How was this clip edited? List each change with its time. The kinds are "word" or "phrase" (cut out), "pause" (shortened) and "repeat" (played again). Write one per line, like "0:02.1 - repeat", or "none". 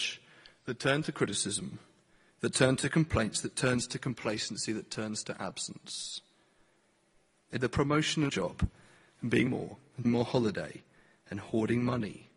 0:07.6 - phrase
0:08.3 - word
0:09.5 - word
0:10.0 - word